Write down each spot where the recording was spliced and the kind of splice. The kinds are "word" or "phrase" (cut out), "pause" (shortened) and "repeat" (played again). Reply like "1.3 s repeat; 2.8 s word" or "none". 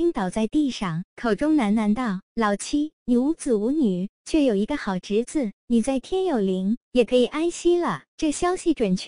5.6 s phrase